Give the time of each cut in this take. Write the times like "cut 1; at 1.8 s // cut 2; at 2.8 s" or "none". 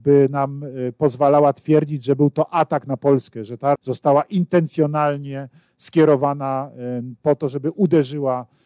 cut 1; at 3.7 s